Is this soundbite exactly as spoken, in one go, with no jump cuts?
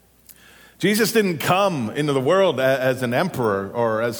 yes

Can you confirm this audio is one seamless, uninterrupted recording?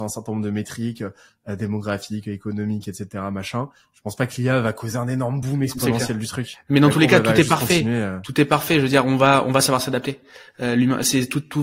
yes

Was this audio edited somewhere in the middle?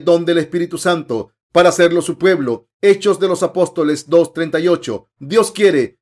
no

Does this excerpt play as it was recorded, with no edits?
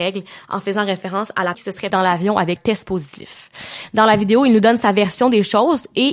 no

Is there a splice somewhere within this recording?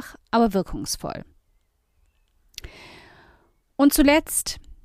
no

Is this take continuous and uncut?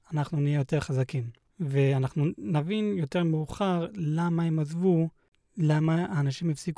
yes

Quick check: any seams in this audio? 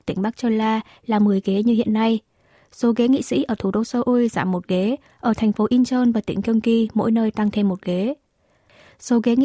no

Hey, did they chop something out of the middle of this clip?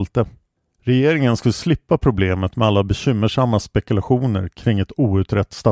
no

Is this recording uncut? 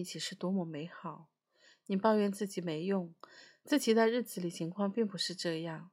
yes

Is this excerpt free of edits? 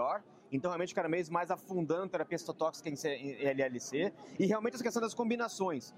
yes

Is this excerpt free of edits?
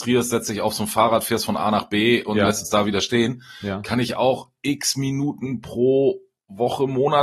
yes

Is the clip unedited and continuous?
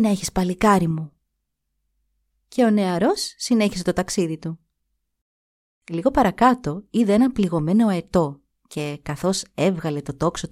yes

